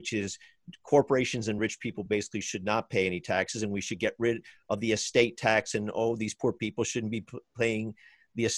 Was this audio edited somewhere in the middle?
no; 0 cuts

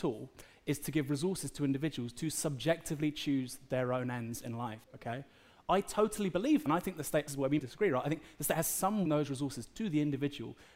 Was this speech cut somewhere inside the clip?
yes; 5 cuts; at 4.8 s, 6.7 s, 7.3 s, 7.6 s, 9.1 s

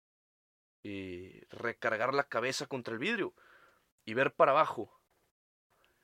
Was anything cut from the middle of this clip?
no; 0 cuts

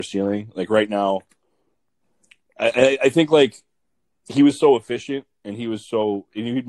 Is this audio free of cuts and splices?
yes; 0 cuts

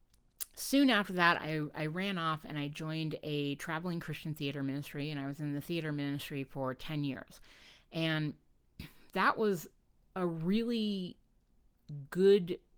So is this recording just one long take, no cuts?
no; 1 cut; at 9.9 s

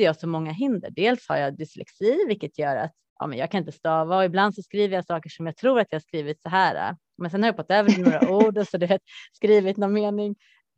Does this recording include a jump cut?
no; 0 cuts

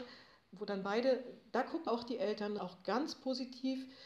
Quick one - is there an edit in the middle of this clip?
yes; 2 cuts; at 1.9 s, 2.6 s

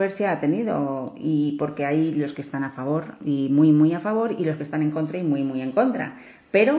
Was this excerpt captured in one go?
yes; 0 cuts

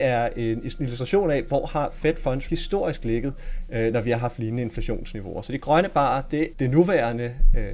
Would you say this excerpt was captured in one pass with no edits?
no; 2 cuts; at 2.5 s, 6.5 s

